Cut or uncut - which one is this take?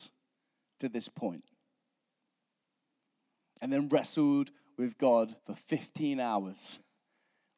cut